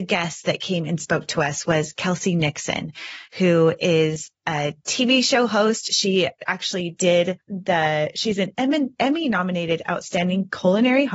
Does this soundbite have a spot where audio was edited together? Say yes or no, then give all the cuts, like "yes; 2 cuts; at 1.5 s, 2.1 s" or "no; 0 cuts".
yes; 2 cuts; at 6.4 s, 7.4 s